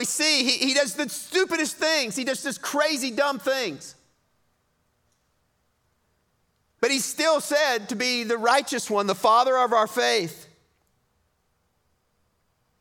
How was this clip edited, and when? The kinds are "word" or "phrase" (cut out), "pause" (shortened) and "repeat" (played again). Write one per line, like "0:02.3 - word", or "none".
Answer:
none